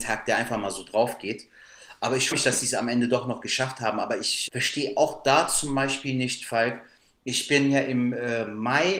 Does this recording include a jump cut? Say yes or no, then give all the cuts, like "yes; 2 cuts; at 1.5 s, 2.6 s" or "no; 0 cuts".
yes; 2 cuts; at 2.3 s, 4.5 s